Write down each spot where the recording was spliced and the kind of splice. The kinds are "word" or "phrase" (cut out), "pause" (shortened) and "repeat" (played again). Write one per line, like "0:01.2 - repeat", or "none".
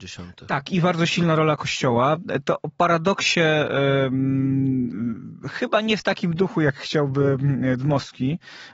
none

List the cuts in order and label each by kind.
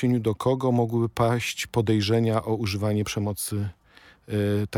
none

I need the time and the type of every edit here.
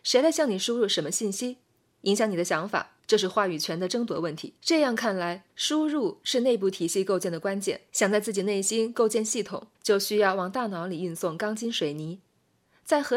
0:03.0 - pause
0:04.6 - pause
0:05.5 - pause
0:07.9 - pause
0:09.7 - pause

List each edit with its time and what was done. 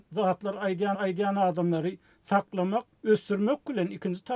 0:00.9 - repeat

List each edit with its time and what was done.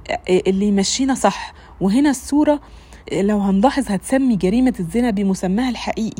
0:03.0 - pause

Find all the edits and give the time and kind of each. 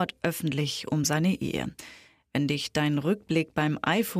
none

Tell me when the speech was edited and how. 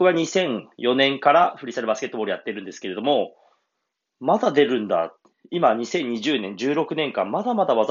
none

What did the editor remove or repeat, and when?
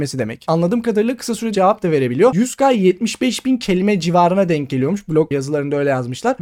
0:01.5 - word

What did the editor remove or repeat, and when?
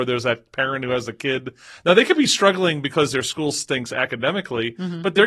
none

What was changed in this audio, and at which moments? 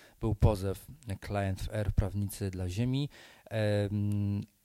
none

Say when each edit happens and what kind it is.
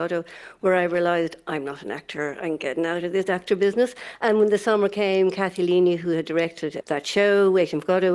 0:06.8 - word

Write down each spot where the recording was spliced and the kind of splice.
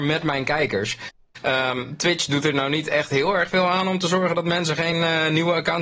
none

